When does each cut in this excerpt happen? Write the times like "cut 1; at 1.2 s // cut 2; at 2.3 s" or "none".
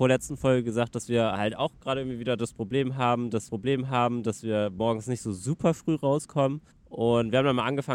cut 1; at 3.5 s // cut 2; at 6.7 s